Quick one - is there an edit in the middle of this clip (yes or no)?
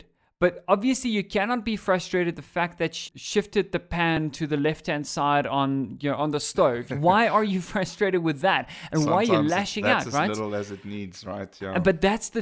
yes